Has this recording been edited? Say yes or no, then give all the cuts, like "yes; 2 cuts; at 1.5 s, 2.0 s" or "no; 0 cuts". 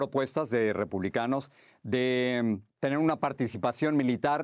yes; 1 cut; at 2.7 s